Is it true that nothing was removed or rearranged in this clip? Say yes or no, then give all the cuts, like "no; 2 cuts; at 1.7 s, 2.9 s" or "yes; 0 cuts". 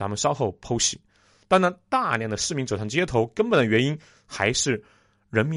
yes; 0 cuts